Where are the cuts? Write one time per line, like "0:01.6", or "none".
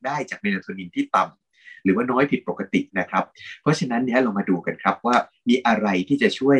0:02.9

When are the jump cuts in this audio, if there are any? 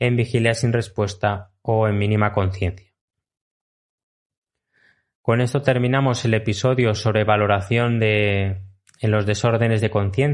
none

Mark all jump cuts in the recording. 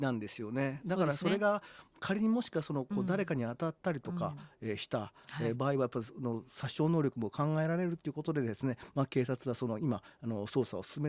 none

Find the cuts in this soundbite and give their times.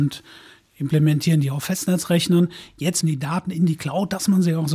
0:03.0

